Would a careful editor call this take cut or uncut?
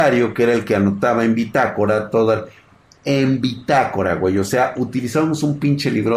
uncut